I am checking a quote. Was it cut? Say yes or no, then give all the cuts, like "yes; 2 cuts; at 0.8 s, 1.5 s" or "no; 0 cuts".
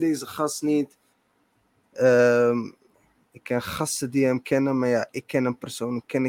yes; 1 cut; at 2.9 s